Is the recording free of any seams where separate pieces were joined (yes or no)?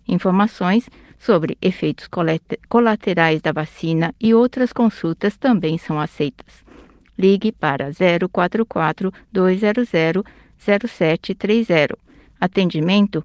yes